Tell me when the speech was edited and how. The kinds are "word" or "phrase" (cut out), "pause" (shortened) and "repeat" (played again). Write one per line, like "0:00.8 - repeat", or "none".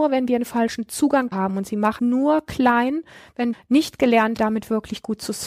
0:01.3 - word
0:02.0 - word
0:03.5 - word
0:04.4 - word